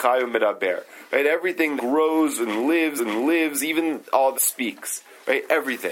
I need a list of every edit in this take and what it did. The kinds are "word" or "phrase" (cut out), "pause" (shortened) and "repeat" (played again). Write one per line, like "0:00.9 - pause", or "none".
0:01.8 - word
0:03.0 - repeat
0:04.3 - word